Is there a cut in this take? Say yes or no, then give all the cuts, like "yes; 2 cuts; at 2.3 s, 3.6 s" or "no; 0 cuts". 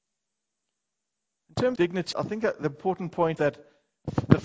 yes; 3 cuts; at 1.8 s, 2.1 s, 3.4 s